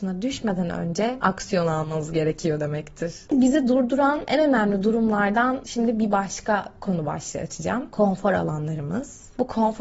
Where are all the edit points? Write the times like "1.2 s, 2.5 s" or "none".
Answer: none

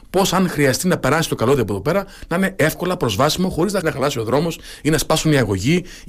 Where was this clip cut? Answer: 3.8 s

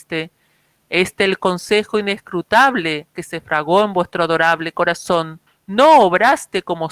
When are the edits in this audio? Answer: 5.5 s

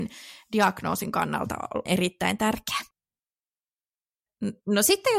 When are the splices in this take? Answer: 1.9 s

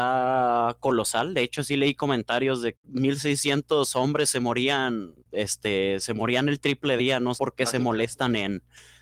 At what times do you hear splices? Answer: 2.7 s, 5.2 s, 7.0 s, 7.3 s

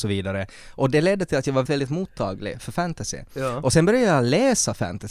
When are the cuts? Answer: 1.7 s, 2.6 s

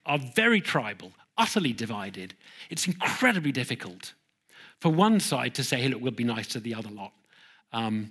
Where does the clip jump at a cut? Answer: none

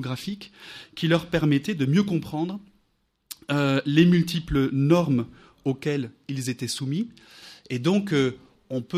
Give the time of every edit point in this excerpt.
none

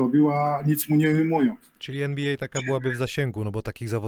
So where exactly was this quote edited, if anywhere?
none

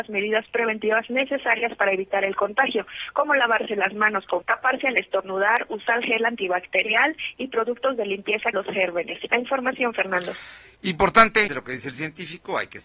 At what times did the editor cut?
4.4 s, 8.5 s, 11.5 s

